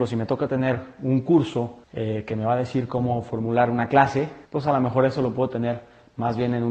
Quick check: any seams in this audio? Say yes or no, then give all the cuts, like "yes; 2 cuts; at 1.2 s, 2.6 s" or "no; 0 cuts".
yes; 2 cuts; at 1.8 s, 4.4 s